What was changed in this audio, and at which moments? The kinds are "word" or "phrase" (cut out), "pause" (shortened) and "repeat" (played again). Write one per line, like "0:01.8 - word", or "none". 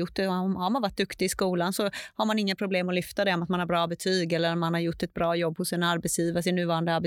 none

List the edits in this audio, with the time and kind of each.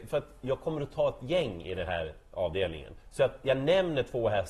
none

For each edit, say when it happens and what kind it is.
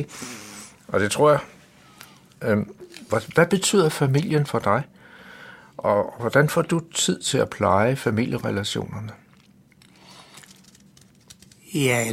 none

